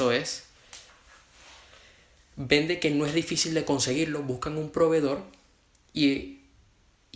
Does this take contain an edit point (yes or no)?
no